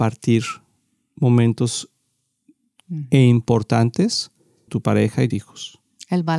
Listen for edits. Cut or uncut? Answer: cut